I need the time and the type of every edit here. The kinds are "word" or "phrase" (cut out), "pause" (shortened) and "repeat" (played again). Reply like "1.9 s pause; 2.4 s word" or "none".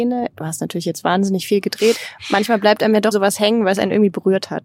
1.9 s word; 3.1 s word